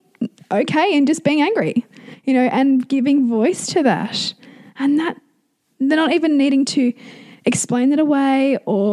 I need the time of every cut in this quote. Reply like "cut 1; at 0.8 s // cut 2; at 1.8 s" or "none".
none